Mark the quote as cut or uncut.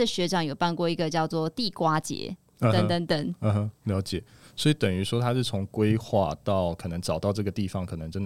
uncut